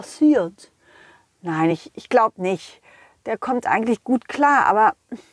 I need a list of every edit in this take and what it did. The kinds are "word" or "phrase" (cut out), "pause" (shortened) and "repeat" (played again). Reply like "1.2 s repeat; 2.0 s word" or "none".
none